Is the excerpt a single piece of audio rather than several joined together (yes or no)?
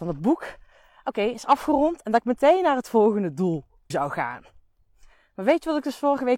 no